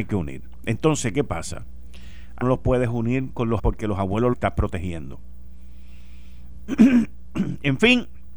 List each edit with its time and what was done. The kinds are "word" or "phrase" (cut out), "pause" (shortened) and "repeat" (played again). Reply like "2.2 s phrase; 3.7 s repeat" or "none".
2.4 s phrase; 3.6 s word; 4.3 s word